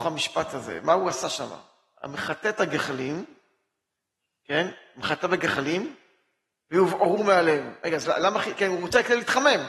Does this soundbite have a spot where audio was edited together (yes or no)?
no